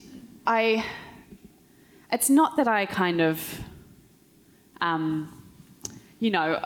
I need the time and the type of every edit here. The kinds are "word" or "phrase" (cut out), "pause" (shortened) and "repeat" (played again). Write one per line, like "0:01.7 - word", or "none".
none